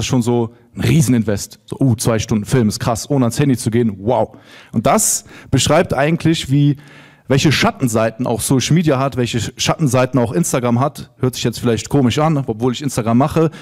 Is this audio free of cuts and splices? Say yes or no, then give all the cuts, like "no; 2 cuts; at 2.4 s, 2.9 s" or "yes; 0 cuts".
yes; 0 cuts